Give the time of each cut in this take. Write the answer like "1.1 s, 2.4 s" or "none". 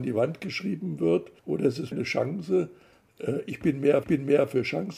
1.4 s, 1.9 s, 4.0 s